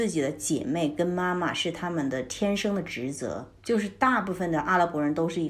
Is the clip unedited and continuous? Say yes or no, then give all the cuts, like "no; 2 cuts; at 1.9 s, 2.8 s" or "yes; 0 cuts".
no; 1 cut; at 3.6 s